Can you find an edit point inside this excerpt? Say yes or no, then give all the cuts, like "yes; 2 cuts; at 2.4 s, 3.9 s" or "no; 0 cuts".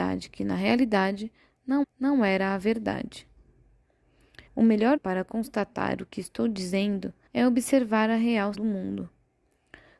yes; 5 cuts; at 1.8 s, 4.5 s, 5.0 s, 7.3 s, 8.5 s